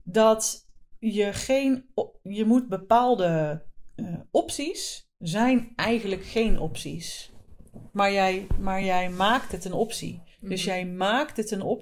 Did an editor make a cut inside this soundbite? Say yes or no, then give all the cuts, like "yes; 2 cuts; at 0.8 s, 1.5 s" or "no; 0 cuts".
no; 0 cuts